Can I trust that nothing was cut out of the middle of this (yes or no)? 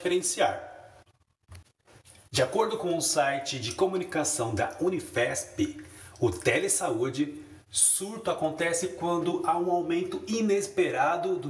yes